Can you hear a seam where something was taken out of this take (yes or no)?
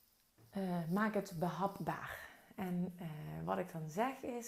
no